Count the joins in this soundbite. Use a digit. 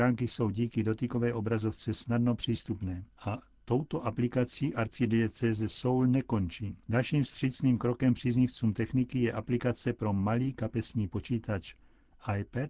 2